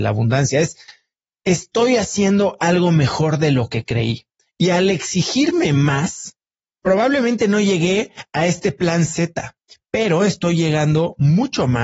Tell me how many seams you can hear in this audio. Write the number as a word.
zero